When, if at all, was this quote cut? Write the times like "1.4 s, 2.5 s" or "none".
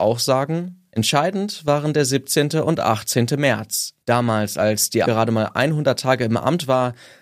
4.0 s, 5.0 s